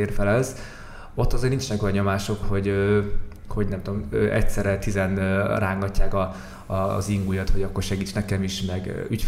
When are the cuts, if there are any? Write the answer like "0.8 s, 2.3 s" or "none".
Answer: 2.4 s